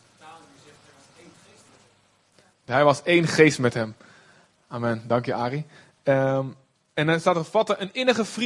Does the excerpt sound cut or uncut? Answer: uncut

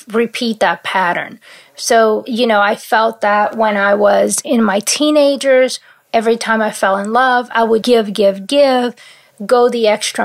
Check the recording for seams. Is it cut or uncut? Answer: cut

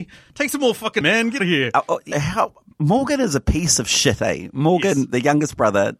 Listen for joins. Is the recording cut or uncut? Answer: cut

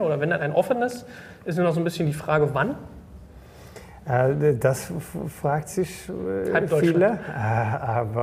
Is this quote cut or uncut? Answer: uncut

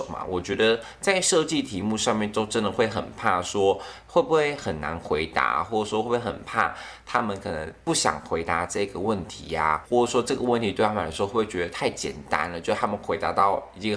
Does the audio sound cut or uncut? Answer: cut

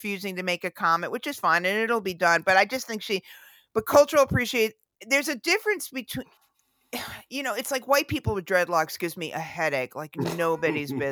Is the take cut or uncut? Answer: uncut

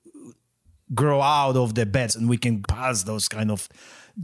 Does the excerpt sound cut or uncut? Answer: cut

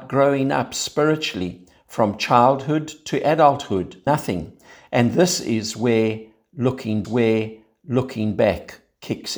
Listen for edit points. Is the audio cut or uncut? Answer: cut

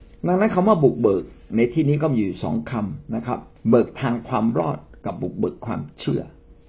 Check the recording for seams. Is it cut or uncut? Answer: cut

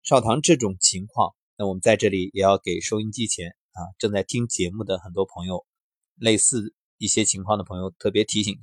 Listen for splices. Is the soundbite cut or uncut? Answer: uncut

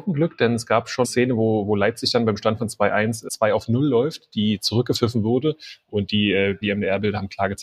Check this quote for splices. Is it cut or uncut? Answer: cut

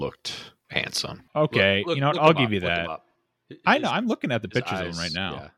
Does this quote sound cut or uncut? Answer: uncut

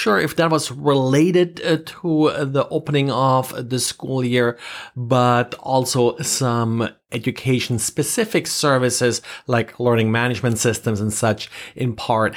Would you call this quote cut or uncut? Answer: uncut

